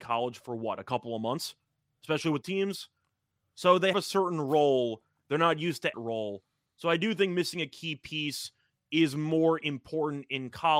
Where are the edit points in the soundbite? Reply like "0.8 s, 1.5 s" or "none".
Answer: 2.4 s, 3.9 s, 5.9 s